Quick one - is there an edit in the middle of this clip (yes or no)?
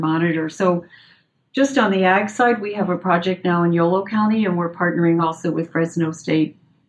no